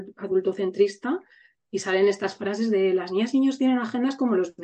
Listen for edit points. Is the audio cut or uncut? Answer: uncut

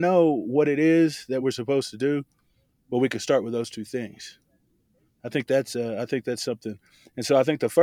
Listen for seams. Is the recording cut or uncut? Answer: uncut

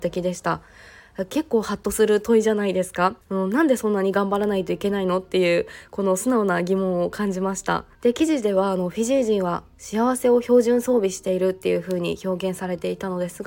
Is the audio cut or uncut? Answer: cut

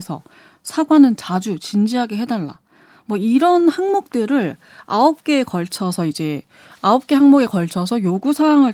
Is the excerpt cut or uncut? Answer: uncut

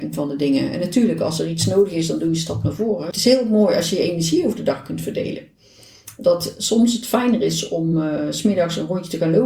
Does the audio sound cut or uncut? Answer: uncut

